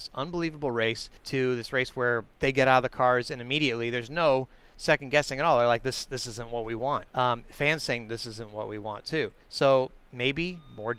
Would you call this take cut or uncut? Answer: cut